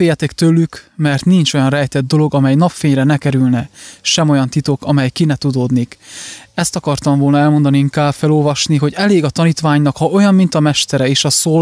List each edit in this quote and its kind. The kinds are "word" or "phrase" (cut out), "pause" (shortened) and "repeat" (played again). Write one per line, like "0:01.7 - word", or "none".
none